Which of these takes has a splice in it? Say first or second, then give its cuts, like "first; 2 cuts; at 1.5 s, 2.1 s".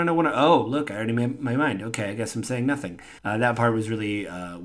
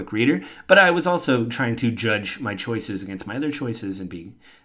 first; 1 cut; at 3.2 s